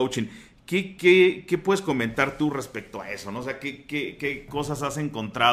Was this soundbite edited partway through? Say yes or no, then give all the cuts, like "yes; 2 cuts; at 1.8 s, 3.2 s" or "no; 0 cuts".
no; 0 cuts